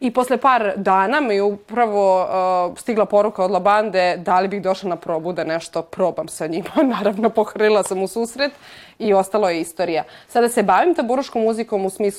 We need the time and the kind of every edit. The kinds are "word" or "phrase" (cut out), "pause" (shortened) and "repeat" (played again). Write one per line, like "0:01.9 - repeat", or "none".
none